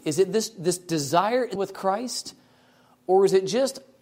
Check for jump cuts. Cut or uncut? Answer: cut